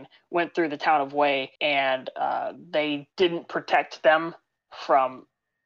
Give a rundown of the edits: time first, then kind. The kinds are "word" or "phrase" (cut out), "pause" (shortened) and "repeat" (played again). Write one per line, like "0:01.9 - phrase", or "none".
0:01.6 - pause